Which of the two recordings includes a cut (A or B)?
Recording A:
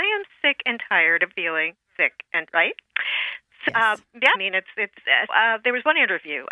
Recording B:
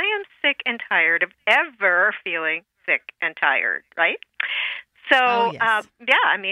A